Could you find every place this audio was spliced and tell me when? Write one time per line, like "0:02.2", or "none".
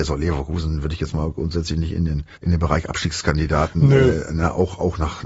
0:02.3